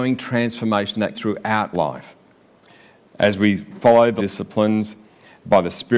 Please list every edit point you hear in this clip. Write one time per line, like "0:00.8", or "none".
0:01.1
0:01.7
0:04.2

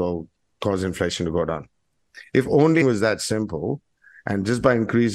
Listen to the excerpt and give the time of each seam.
0:02.8

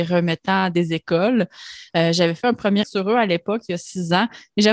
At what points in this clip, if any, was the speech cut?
0:02.8

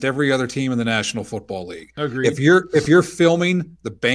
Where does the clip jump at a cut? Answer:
none

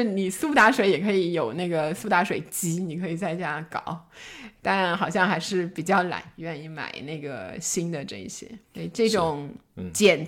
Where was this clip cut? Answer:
0:08.6

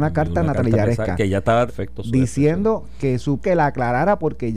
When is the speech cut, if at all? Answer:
0:01.7
0:03.4

